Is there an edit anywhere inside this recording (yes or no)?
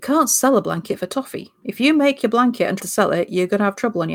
yes